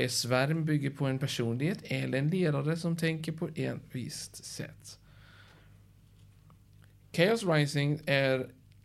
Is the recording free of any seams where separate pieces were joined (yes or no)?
yes